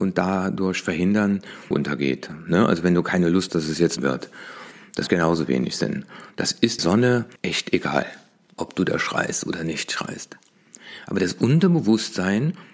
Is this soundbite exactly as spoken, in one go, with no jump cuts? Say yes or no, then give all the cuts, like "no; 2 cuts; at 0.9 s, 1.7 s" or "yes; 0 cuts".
no; 6 cuts; at 1.7 s, 3.5 s, 4.0 s, 5.1 s, 6.8 s, 7.4 s